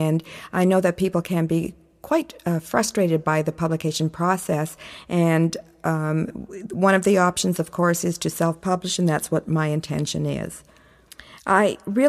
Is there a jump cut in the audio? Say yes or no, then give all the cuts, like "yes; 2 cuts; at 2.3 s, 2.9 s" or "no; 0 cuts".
no; 0 cuts